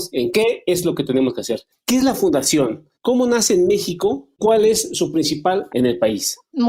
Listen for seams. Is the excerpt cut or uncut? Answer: cut